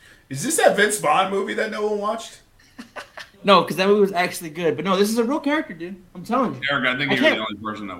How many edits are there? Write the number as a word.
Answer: one